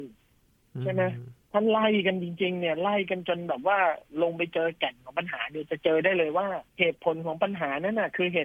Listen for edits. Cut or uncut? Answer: cut